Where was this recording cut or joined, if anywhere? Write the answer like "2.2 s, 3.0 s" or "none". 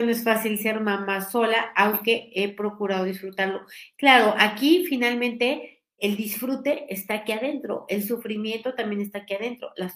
6.0 s